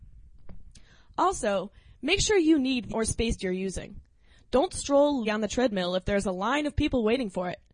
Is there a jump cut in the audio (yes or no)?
yes